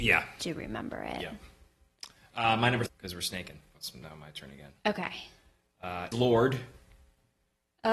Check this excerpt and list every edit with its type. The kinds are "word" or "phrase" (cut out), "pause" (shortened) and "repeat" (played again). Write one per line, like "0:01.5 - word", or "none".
0:02.9 - word
0:03.7 - word
0:06.1 - word